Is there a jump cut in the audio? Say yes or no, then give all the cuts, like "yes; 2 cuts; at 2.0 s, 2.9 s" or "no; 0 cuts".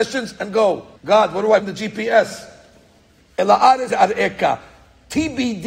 yes; 3 cuts; at 1.0 s, 1.6 s, 3.9 s